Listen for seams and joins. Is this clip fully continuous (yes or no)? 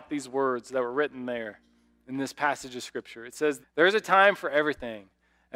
no